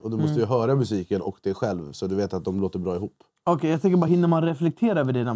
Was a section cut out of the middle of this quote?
no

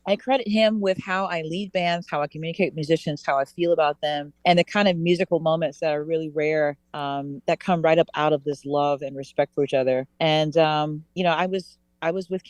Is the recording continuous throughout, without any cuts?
no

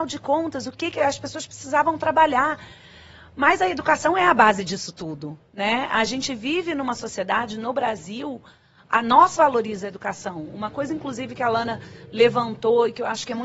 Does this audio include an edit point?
yes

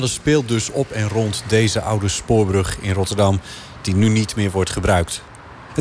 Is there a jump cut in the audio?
no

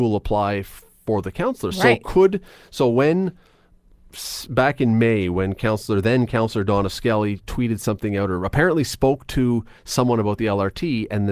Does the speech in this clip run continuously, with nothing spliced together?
yes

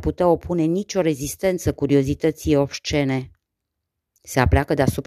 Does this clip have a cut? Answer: no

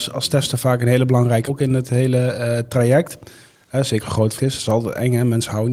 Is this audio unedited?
no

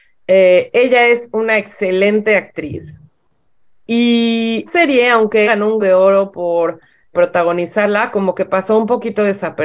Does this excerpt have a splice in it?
yes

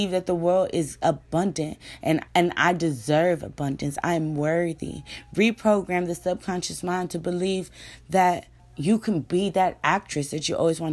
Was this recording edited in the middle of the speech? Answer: yes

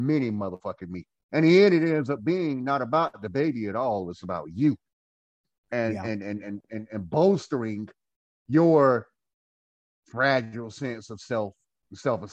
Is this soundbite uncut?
yes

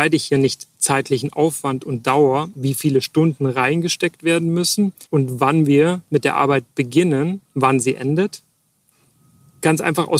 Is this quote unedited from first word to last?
no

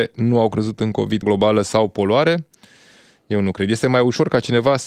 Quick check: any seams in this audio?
yes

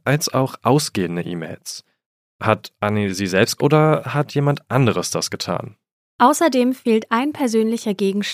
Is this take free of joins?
no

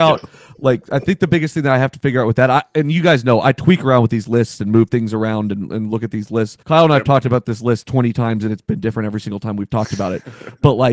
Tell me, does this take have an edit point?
yes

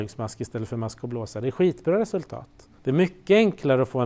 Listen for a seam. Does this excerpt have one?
yes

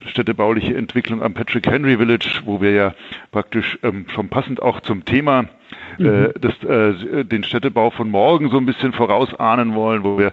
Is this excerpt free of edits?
yes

